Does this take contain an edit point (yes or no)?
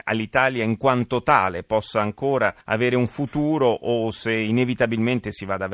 yes